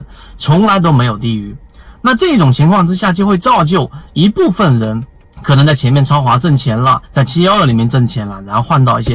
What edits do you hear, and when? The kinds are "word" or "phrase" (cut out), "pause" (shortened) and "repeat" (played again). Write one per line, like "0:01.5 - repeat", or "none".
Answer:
0:05.2 - pause
0:07.1 - pause